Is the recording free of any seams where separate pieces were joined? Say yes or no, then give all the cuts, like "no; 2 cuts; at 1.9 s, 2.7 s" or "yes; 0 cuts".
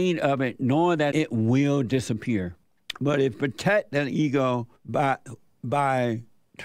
no; 3 cuts; at 1.1 s, 3.3 s, 4.8 s